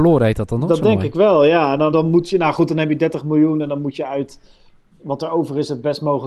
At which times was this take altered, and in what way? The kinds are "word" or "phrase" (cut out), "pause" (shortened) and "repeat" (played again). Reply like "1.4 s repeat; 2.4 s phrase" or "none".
1.9 s word